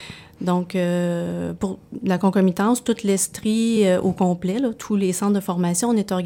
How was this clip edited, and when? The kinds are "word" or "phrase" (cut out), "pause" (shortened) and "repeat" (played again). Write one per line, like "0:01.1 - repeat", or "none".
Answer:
none

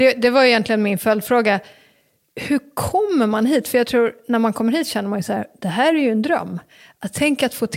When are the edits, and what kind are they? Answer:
none

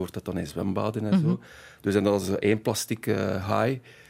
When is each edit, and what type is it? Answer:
none

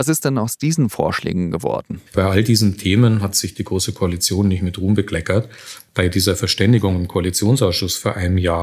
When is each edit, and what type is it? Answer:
0:02.1 - pause

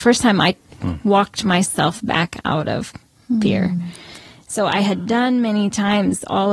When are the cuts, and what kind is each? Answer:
none

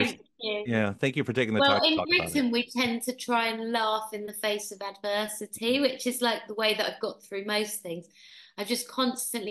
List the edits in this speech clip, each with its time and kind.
none

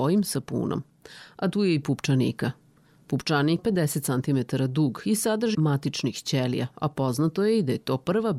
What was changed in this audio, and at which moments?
0:01.8 - word
0:03.6 - phrase
0:05.5 - word

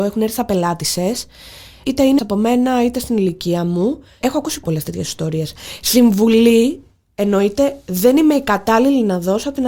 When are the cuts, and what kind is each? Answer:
0:02.2 - word
0:04.6 - word

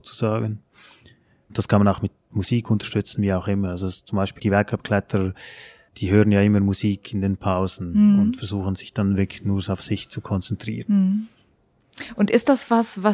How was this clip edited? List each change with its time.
0:04.4 - word

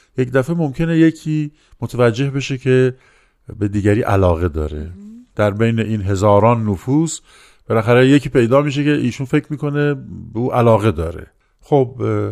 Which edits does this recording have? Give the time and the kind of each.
none

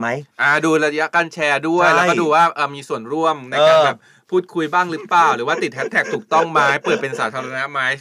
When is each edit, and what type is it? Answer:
none

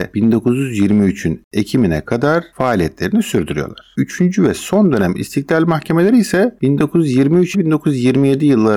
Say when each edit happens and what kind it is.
0:07.5 - word

